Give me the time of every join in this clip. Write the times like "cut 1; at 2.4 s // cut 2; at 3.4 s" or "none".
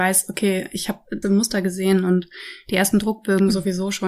cut 1; at 1.2 s